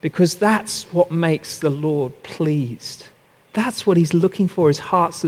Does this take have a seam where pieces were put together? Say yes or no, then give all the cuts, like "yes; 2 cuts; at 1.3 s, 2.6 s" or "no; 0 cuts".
no; 0 cuts